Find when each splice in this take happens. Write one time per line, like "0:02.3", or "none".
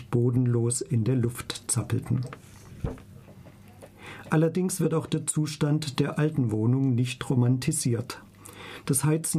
none